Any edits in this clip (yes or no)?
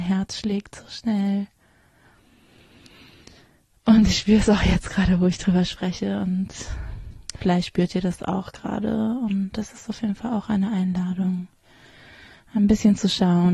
no